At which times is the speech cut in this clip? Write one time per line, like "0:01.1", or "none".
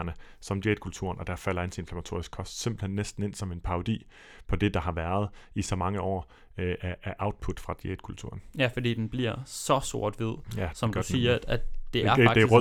none

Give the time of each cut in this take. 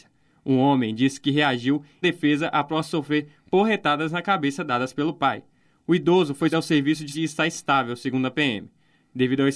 0:02.0
0:06.5
0:07.1

